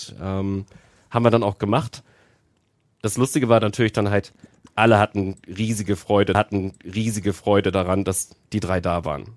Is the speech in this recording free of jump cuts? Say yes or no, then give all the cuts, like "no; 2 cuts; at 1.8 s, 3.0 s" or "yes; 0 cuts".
no; 1 cut; at 6.3 s